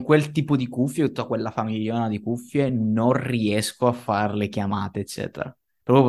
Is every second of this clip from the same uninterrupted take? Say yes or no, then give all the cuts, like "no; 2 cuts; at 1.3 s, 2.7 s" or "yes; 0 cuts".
yes; 0 cuts